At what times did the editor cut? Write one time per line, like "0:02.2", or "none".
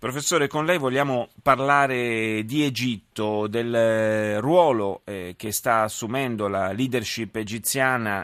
none